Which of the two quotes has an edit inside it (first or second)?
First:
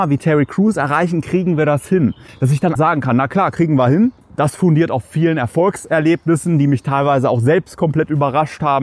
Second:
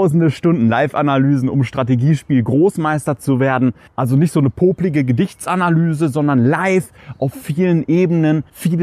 first